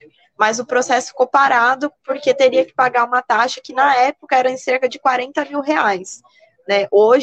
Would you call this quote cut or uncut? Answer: uncut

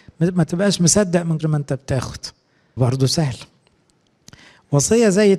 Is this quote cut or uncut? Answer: cut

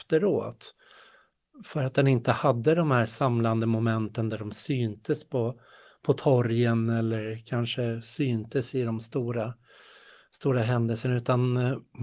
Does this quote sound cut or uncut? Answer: uncut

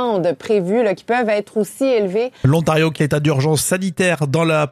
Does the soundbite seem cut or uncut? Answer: cut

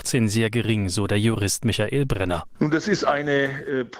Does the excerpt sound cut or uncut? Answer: uncut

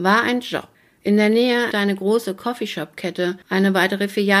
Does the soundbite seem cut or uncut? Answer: cut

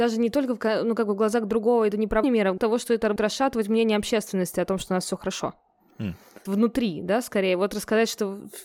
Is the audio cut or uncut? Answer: cut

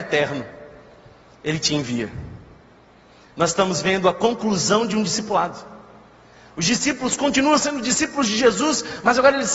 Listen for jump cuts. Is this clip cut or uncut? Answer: uncut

